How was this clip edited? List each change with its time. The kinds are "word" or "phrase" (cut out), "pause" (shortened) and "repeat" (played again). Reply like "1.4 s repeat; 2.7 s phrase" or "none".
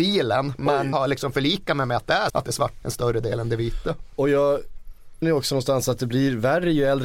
0.9 s word; 2.3 s word; 2.8 s word; 5.2 s word